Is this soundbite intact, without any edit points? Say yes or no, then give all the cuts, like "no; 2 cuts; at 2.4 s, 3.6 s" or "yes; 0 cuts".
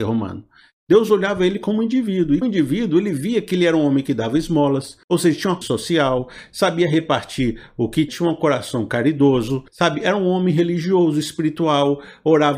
no; 5 cuts; at 2.4 s, 5.0 s, 5.6 s, 8.1 s, 9.7 s